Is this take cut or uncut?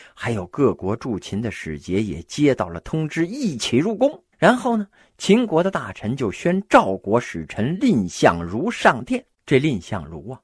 cut